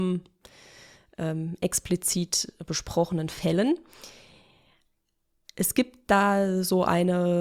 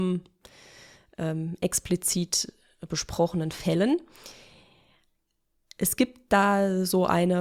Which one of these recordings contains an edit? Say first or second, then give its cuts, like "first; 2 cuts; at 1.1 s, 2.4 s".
first; 1 cut; at 2.6 s